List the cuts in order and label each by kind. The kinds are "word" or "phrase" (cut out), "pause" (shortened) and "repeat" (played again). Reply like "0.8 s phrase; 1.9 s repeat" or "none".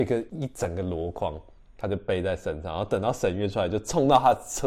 none